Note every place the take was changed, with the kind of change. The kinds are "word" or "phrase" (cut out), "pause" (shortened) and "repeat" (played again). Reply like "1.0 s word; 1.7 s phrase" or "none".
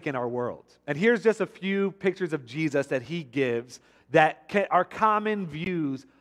none